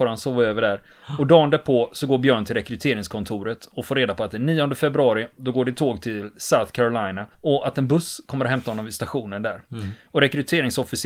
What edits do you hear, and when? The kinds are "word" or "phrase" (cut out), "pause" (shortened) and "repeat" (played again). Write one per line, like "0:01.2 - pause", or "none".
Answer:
0:07.3 - pause